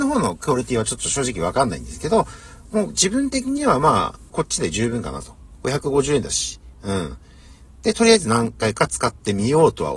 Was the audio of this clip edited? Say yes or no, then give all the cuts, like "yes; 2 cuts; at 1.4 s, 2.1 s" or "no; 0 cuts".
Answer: yes; 1 cut; at 4.3 s